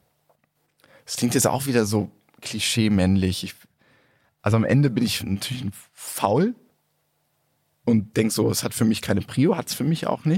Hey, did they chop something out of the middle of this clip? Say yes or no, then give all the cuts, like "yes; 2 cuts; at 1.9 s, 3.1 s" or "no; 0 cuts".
no; 0 cuts